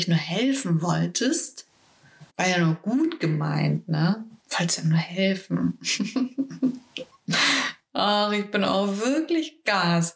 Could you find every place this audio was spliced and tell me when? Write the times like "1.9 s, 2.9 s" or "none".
2.3 s, 4.4 s